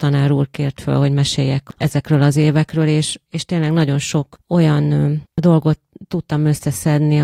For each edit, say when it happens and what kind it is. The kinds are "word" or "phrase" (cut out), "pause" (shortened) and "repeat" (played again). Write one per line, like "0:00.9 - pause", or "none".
0:05.3 - pause

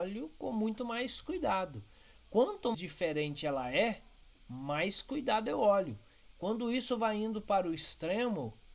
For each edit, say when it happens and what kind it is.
0:02.7 - word

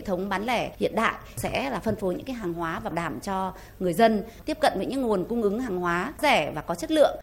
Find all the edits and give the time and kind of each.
0:02.9 - word
0:06.2 - word

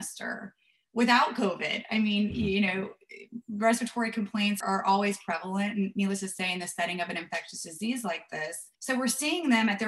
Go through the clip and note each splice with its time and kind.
0:04.6 - word
0:08.7 - pause

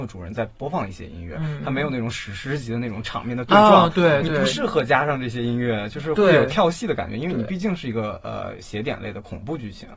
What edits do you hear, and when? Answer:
none

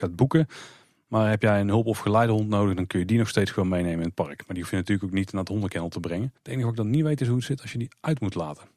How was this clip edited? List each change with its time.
0:06.4 - pause

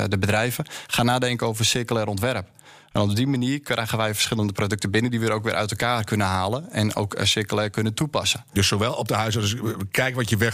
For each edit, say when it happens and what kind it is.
none

